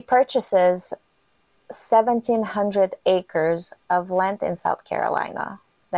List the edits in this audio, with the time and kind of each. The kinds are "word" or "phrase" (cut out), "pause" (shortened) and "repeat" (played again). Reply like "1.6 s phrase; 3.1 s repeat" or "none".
none

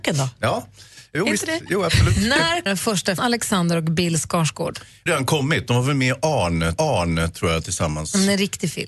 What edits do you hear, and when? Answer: 1.1 s word; 2.7 s word; 3.2 s phrase; 5.1 s phrase; 6.8 s repeat

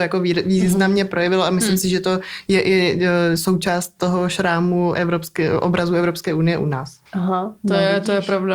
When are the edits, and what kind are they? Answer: 7.1 s pause

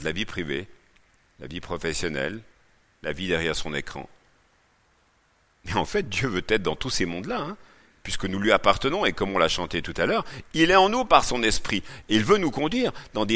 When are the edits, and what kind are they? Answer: none

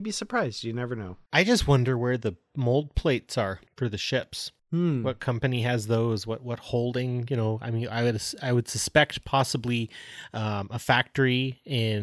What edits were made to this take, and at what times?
none

